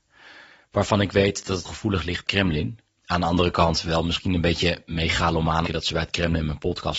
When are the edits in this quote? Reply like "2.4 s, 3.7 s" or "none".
1.6 s, 2.3 s, 2.9 s, 5.7 s

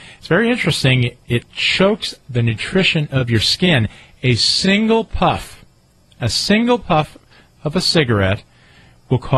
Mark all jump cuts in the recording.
none

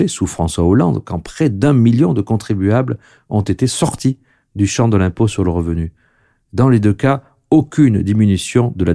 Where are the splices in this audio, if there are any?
none

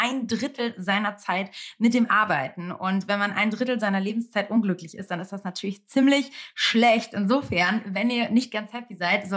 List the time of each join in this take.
none

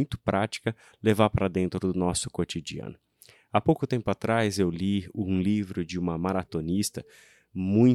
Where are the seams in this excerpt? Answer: none

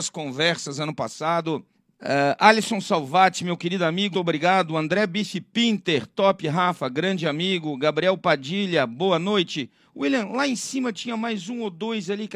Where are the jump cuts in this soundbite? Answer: 1.7 s, 4.1 s

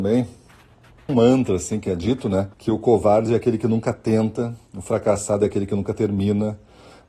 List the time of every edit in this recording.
1.1 s, 2.5 s

